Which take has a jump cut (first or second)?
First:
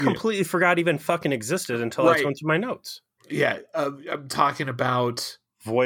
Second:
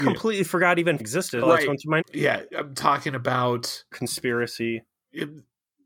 second